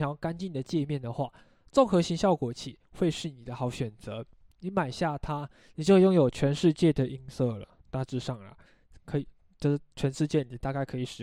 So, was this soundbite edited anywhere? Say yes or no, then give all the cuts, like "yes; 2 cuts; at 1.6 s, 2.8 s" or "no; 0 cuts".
no; 0 cuts